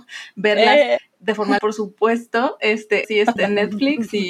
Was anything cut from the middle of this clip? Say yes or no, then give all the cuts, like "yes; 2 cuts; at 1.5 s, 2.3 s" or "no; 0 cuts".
yes; 2 cuts; at 1.6 s, 3.0 s